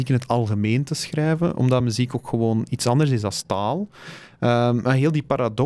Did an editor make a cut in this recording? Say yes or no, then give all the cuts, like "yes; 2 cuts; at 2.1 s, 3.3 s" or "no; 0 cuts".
no; 0 cuts